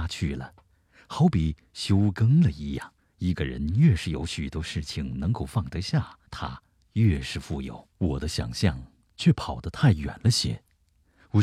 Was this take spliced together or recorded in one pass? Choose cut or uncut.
cut